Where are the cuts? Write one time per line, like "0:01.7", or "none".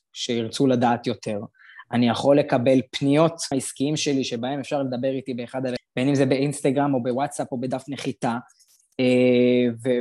0:03.5
0:05.8

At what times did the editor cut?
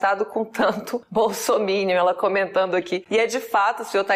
none

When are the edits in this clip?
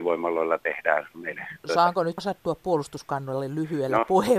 0:01.1
0:02.2

